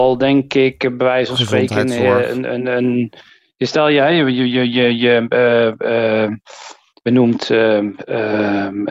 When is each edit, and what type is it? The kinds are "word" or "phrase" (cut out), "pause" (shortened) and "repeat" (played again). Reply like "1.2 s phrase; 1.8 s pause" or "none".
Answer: none